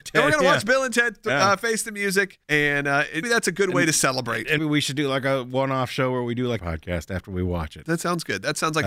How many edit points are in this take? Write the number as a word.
four